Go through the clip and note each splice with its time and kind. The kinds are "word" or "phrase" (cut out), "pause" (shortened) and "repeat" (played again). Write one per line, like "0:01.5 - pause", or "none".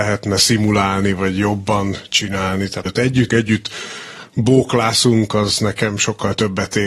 0:02.9 - phrase
0:03.3 - word